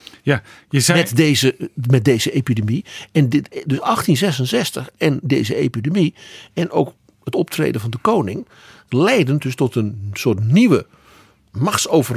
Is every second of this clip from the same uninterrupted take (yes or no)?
yes